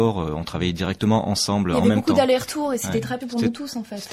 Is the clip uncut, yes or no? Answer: no